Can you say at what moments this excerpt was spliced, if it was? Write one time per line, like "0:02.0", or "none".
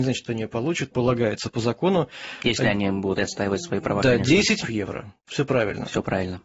0:00.9
0:03.2
0:04.6